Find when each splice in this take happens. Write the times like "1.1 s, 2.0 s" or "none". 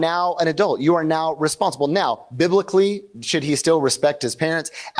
none

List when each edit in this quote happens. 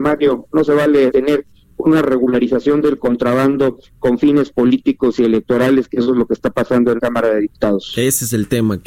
1.1 s, 7.0 s

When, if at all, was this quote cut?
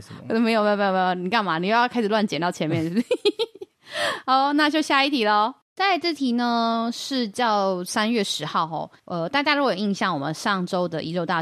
5.6 s, 9.0 s

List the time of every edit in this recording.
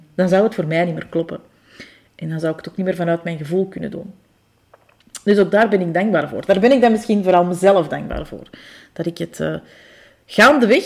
none

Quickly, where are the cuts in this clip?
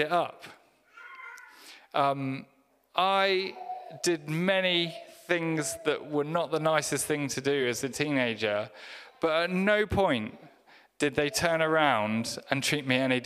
none

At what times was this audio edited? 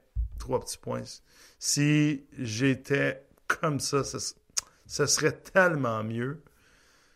none

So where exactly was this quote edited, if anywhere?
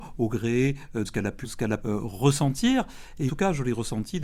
1.0 s, 1.4 s, 1.8 s, 3.3 s

